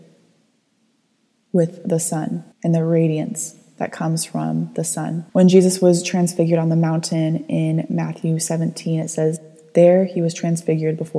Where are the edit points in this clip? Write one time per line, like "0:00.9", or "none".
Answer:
0:02.5
0:05.3